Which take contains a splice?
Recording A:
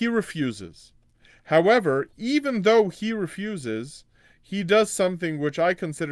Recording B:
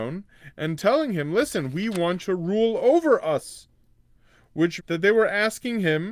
B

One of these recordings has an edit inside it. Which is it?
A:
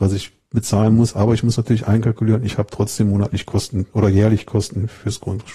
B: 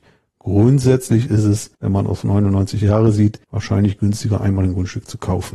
B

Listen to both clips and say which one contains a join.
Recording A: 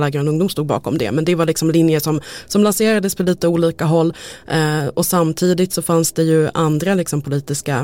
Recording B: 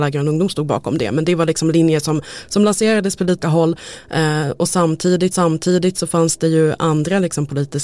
B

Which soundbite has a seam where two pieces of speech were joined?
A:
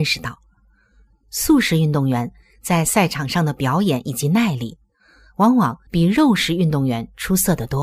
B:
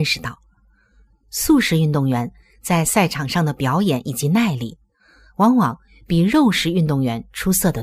A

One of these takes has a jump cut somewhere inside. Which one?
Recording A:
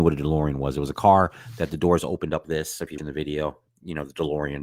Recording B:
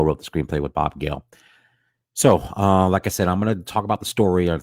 A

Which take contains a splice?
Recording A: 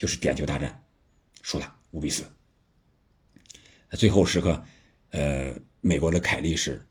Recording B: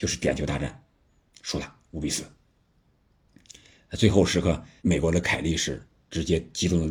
B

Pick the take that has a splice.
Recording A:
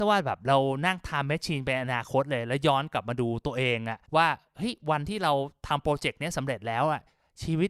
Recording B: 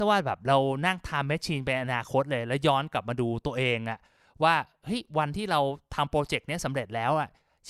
A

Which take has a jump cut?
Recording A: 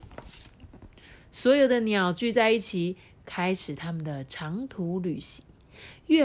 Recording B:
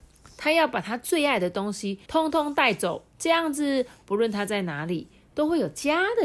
B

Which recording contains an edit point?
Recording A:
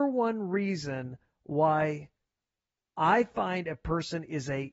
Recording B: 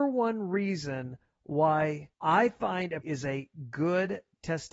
B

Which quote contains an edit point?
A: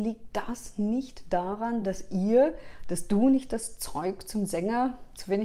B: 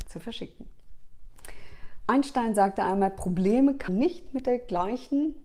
B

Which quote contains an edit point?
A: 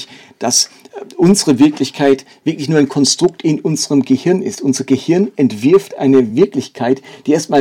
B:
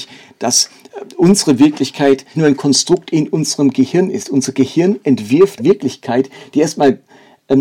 B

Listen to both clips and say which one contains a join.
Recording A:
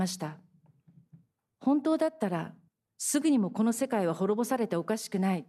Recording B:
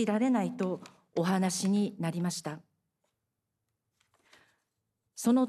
A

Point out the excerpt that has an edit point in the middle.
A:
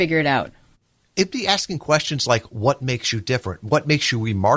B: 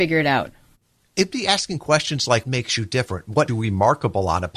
B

